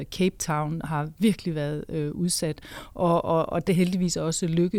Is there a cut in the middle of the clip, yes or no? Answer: yes